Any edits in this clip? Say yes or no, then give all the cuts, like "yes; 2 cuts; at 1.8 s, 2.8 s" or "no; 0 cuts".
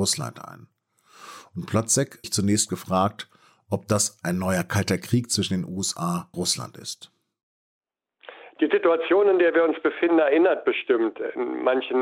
yes; 2 cuts; at 2.2 s, 6.3 s